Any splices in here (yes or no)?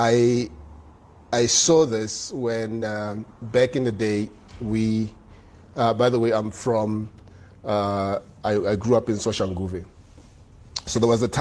no